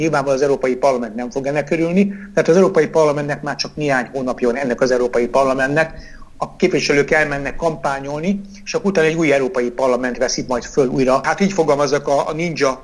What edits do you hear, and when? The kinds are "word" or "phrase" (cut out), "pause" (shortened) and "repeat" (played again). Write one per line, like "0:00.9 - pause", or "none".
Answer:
none